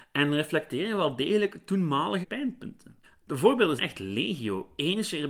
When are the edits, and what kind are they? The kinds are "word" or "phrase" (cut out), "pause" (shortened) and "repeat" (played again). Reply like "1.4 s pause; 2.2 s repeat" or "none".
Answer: 2.2 s word; 3.0 s pause; 3.8 s word